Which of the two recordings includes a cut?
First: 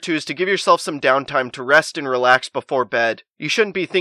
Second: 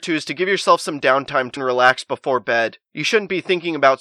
second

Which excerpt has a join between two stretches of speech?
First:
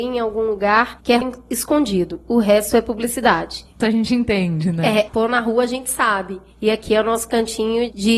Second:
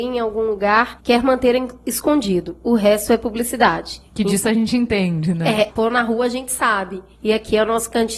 first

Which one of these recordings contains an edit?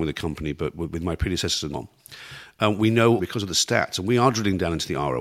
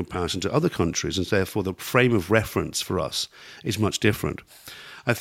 first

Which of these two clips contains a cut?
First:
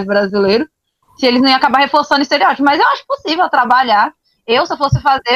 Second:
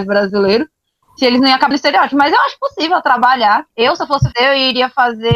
second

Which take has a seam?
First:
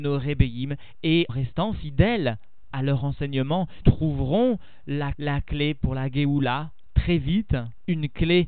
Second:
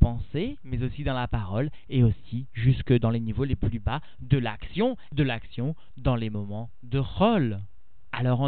first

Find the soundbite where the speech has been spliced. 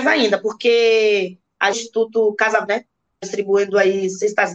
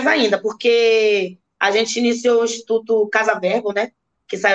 first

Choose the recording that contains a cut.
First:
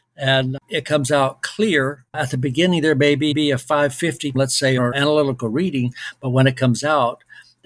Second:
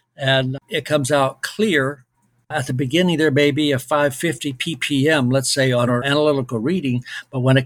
first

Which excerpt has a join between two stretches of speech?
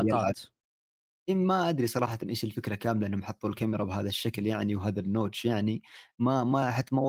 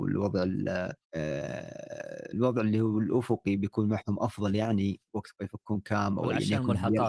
second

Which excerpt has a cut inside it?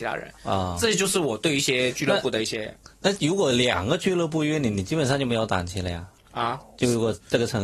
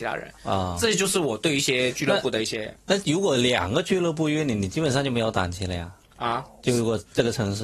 second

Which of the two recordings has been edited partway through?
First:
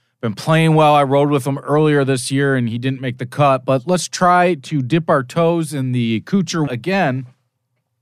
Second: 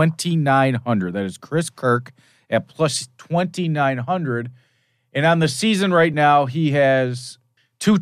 first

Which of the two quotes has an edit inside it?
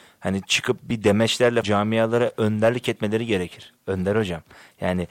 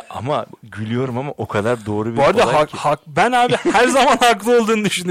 first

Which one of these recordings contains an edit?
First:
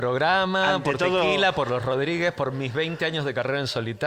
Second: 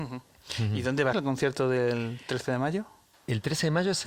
second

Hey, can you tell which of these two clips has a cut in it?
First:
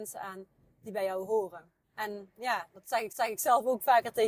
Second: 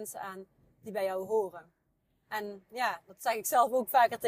first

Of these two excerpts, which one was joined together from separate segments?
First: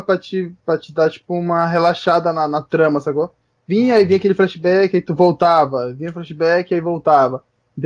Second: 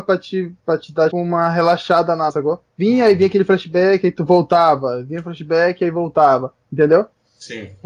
second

